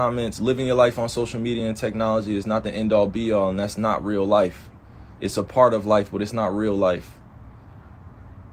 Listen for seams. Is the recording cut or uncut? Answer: uncut